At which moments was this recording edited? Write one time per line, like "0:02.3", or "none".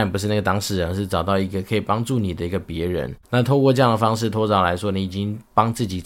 0:03.2

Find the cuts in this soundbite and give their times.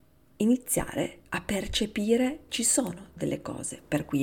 0:01.3
0:02.5

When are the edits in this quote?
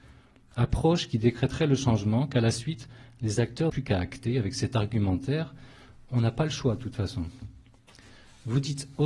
0:03.7

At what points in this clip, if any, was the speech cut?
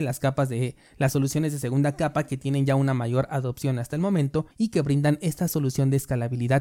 0:04.5

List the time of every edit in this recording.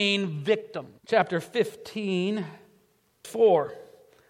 0:01.0
0:03.2

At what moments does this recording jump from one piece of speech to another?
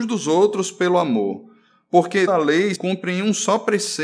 0:02.3
0:02.8

